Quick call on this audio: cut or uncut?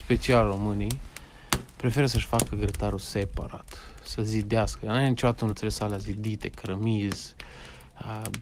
cut